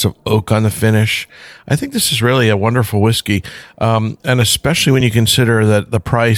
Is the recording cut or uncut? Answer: uncut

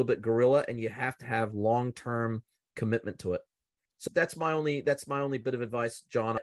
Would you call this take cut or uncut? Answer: uncut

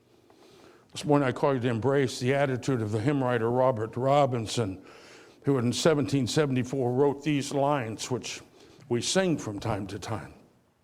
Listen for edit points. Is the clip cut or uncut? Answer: uncut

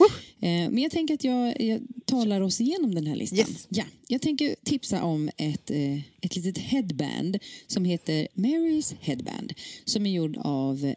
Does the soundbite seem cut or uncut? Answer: uncut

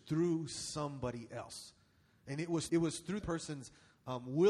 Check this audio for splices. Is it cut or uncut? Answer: cut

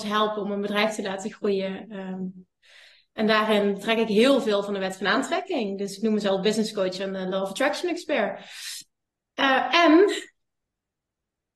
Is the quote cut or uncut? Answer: uncut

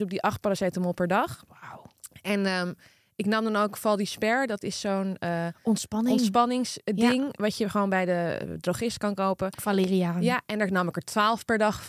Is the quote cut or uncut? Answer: uncut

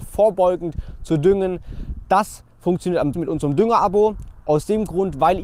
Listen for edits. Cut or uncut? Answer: cut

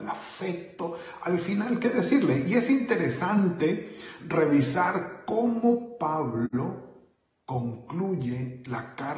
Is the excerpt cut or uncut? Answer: uncut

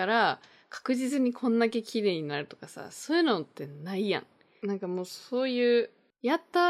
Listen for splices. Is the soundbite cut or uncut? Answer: uncut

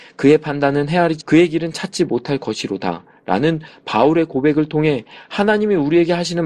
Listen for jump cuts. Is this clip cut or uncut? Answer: cut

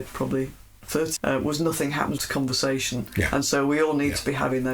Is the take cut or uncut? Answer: cut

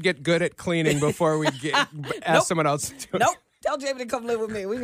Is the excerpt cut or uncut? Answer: uncut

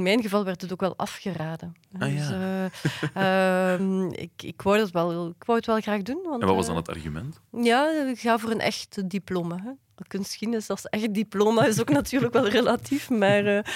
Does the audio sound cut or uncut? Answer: uncut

